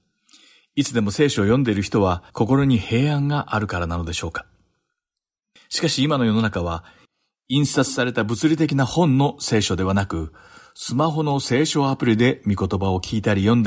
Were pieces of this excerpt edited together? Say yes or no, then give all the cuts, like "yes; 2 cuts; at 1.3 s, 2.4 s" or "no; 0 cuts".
yes; 1 cut; at 2.3 s